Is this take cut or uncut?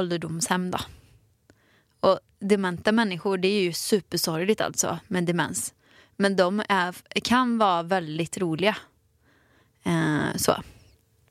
uncut